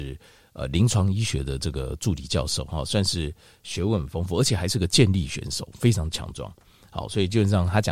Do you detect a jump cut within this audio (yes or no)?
no